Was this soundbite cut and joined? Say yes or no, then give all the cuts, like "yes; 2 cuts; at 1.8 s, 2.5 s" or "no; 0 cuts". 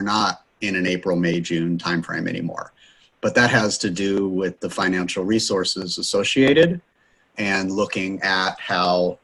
no; 0 cuts